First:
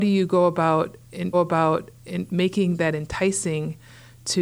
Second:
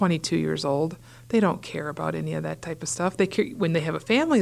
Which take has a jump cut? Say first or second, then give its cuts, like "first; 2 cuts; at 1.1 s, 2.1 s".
first; 1 cut; at 1.3 s